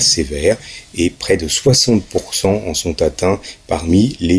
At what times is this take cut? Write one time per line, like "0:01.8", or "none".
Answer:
none